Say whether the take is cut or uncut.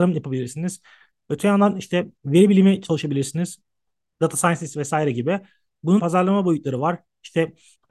cut